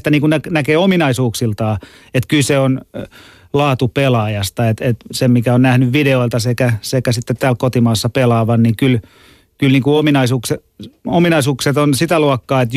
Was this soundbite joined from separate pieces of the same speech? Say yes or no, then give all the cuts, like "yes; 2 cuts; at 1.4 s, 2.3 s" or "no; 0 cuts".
no; 0 cuts